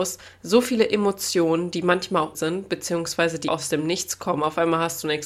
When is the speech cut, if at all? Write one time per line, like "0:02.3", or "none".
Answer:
0:02.3
0:03.5